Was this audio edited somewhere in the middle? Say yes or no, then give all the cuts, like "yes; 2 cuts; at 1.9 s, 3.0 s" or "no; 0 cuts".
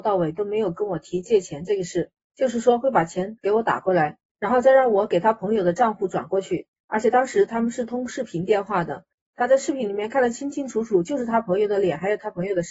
no; 0 cuts